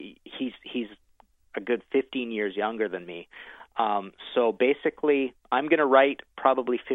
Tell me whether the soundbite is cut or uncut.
uncut